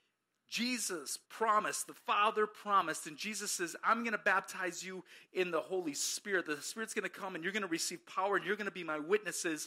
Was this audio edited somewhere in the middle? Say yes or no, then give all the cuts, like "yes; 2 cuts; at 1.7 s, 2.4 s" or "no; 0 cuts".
yes; 1 cut; at 1.2 s